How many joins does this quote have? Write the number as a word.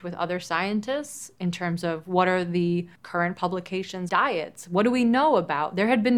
two